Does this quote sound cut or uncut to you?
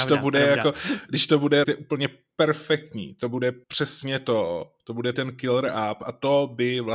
cut